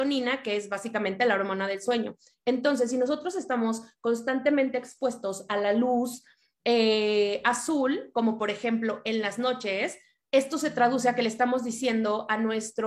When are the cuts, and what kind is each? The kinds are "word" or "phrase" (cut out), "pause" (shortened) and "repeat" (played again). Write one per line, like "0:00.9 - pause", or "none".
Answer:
none